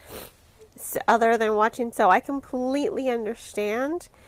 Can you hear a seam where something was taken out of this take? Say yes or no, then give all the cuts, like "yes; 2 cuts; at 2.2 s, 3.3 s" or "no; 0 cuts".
yes; 1 cut; at 1.9 s